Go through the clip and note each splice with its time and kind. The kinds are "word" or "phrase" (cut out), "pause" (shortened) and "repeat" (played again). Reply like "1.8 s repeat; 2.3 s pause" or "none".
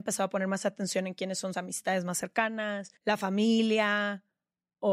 1.5 s word; 3.0 s pause